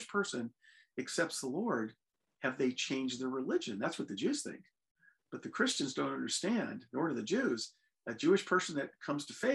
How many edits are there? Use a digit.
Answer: 0